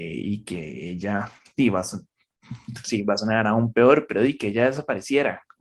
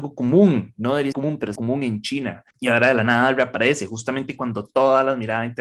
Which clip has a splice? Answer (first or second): second